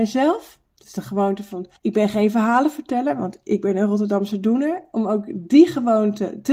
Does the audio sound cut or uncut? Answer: cut